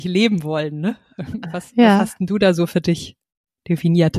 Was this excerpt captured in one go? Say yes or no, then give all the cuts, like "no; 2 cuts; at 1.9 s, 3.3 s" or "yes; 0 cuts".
yes; 0 cuts